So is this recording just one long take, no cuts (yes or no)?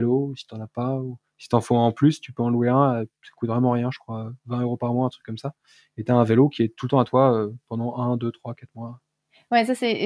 yes